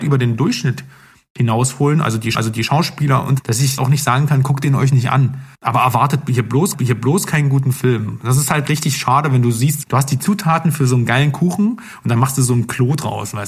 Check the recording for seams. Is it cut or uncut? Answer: cut